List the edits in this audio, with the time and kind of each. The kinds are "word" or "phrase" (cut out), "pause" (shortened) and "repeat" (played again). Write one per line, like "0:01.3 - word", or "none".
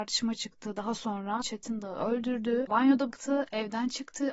0:01.4 - word
0:02.7 - word
0:03.1 - word